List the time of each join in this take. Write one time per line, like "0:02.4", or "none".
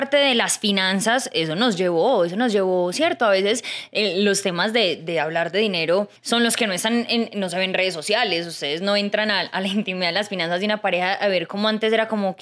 0:06.2